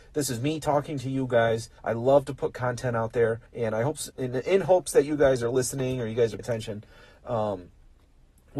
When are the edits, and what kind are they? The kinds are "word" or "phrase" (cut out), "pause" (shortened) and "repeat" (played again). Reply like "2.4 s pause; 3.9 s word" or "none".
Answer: 1.8 s pause; 3.5 s pause; 4.1 s phrase; 6.4 s word